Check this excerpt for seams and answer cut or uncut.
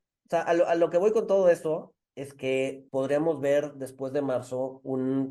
cut